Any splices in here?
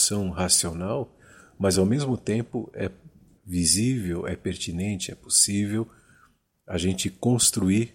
no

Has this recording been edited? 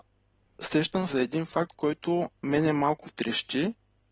yes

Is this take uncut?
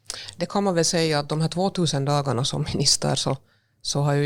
yes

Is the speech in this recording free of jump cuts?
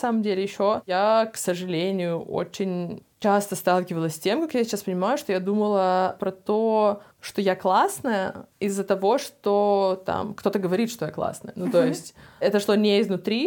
no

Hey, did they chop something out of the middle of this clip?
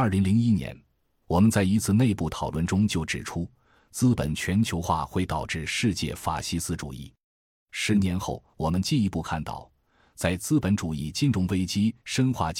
no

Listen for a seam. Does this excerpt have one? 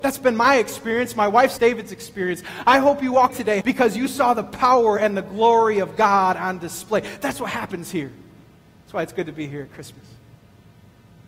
yes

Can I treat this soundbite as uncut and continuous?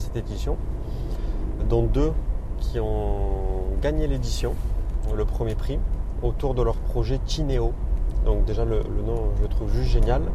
no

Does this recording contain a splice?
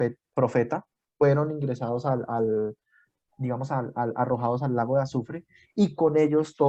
no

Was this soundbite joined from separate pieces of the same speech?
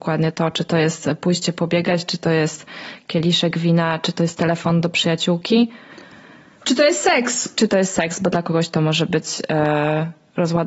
no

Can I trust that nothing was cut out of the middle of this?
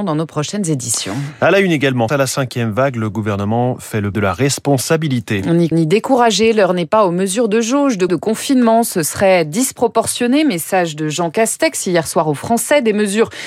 no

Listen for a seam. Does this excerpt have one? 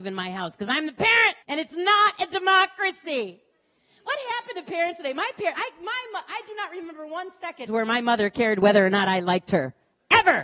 yes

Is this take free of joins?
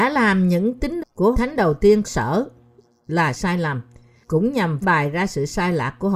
no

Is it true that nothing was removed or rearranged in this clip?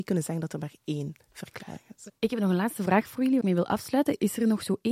no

